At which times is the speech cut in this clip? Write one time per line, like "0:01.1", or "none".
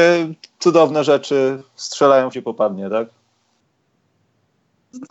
0:02.3